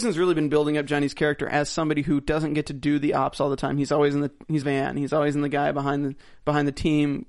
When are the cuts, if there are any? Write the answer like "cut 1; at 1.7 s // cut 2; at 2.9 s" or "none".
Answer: cut 1; at 4.6 s